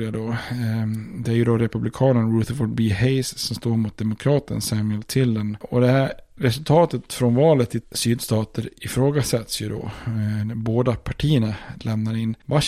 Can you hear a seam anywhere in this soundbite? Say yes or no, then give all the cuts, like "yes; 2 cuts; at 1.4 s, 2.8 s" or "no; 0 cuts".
yes; 1 cut; at 7.8 s